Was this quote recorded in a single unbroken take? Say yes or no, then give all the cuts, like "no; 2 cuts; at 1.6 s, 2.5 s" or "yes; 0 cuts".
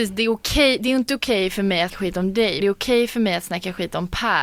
no; 2 cuts; at 1.9 s, 2.6 s